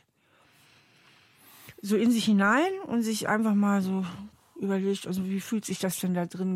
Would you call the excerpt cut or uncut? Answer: uncut